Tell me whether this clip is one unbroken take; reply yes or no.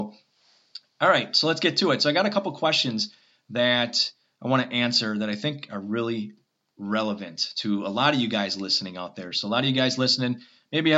yes